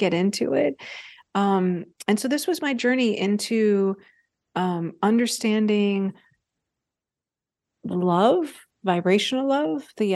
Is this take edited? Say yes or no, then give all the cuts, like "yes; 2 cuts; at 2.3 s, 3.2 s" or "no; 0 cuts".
no; 0 cuts